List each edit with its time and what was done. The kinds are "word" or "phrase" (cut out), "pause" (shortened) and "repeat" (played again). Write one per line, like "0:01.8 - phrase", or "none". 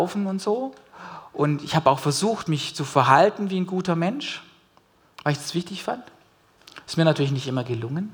none